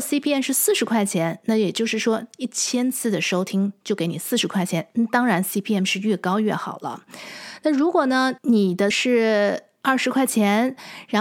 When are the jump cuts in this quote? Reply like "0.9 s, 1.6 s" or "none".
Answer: 8.4 s, 8.9 s